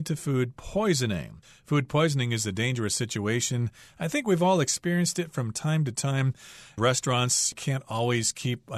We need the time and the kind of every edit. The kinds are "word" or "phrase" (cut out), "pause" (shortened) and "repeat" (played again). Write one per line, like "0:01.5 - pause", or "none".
none